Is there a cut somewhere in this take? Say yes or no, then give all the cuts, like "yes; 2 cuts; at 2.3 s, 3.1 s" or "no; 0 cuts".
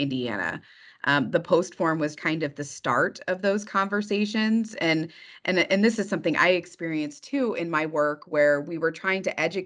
yes; 1 cut; at 2.1 s